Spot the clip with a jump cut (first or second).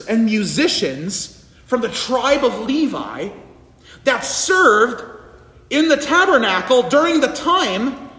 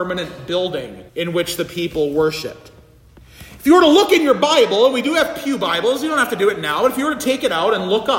second